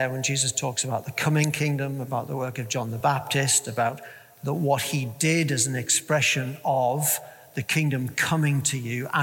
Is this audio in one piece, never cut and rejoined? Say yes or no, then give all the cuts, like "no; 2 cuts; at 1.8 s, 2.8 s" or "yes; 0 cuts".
yes; 0 cuts